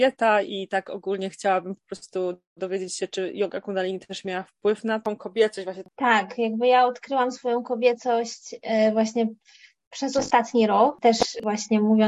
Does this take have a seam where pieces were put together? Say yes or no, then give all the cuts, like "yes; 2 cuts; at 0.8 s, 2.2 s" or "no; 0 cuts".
no; 0 cuts